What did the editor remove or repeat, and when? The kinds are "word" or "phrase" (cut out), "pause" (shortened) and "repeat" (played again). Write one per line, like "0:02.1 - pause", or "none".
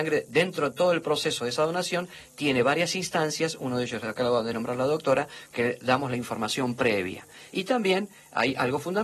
none